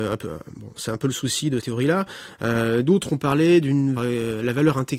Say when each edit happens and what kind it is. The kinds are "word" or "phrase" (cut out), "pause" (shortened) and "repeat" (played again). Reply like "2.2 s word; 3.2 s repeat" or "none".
1.6 s word; 4.0 s word